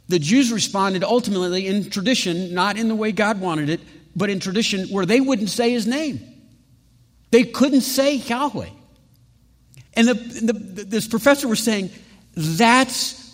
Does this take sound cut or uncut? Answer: cut